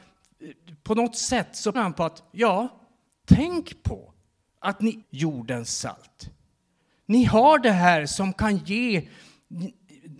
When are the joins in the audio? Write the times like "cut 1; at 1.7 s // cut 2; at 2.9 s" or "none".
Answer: cut 1; at 1.7 s // cut 2; at 5.0 s